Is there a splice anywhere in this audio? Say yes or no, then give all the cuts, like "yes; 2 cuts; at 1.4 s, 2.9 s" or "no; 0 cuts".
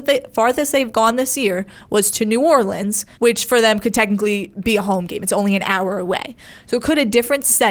yes; 1 cut; at 3.1 s